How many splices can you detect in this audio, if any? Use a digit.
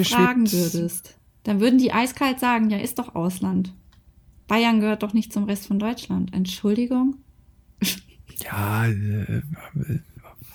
0